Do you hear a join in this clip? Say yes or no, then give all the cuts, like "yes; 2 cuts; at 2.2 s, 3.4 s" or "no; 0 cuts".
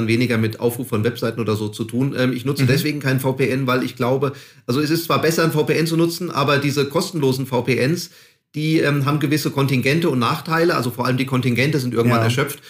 no; 0 cuts